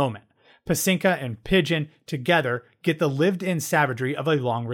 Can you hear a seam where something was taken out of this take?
no; 0 cuts

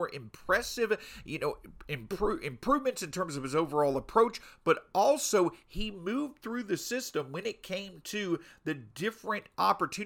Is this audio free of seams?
yes; 0 cuts

